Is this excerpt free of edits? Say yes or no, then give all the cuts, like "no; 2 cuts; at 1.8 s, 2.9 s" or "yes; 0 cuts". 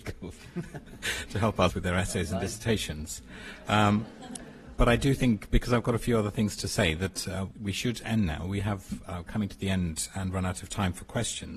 no; 3 cuts; at 1.7 s, 4.8 s, 7.5 s